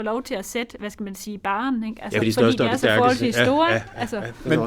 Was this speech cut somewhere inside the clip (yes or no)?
yes